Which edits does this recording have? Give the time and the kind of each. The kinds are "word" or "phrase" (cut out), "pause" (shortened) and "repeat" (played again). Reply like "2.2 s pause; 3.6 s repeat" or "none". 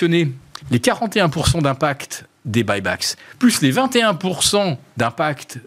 none